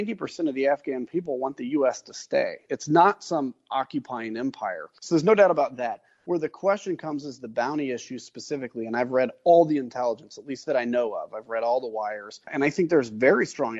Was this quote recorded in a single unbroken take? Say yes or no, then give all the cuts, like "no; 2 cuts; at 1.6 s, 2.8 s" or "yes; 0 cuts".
yes; 0 cuts